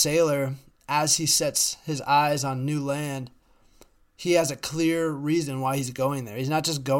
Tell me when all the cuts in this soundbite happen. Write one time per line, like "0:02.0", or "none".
none